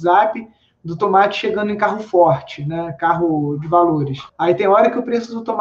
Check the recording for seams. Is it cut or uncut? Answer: cut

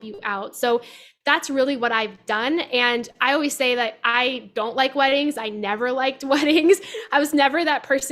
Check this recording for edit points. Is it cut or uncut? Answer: uncut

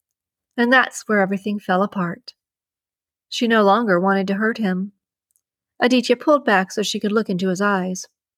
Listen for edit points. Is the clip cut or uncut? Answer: uncut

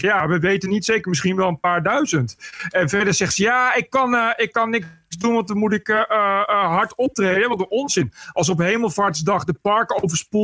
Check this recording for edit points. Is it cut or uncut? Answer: uncut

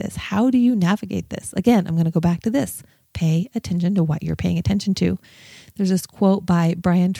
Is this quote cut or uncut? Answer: uncut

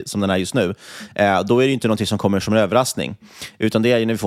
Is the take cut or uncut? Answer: uncut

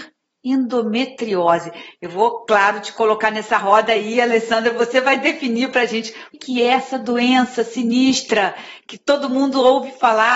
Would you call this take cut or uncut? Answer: cut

